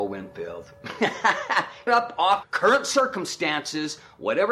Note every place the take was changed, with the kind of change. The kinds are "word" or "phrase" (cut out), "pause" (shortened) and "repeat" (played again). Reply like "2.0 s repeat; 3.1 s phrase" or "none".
1.9 s word; 2.4 s word

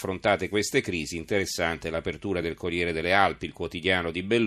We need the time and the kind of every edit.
none

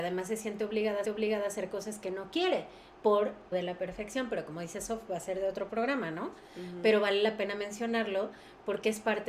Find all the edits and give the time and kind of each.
1.0 s repeat; 3.5 s phrase

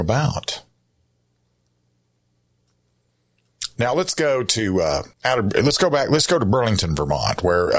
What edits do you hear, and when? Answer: 5.1 s pause

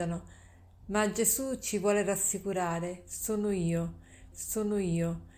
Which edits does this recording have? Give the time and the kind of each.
4.3 s repeat

